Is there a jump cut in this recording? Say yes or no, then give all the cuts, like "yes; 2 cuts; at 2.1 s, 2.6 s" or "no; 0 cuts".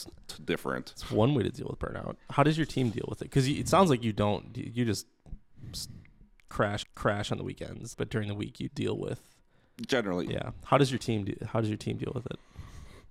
yes; 4 cuts; at 6.8 s, 7.9 s, 8.7 s, 10.3 s